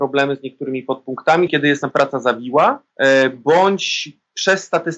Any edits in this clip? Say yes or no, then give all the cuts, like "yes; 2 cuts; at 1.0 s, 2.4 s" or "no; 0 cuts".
yes; 3 cuts; at 1.5 s, 1.9 s, 2.9 s